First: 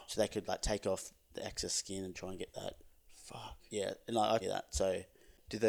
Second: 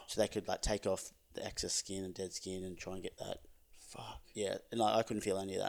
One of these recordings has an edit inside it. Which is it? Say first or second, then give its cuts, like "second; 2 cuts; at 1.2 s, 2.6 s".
first; 2 cuts; at 2.1 s, 4.4 s